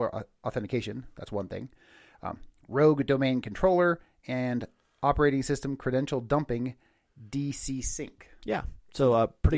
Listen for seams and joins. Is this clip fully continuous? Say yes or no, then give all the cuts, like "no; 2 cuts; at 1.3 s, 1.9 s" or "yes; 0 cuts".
yes; 0 cuts